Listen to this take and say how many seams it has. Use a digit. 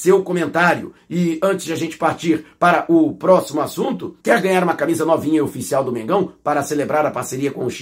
1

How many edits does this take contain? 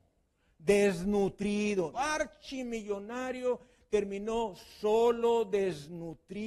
1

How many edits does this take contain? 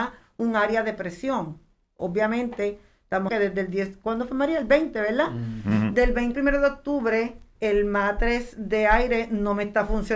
3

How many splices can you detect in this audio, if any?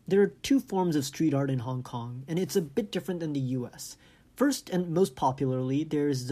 0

